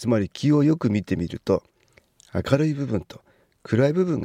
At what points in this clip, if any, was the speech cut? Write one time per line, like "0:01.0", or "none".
none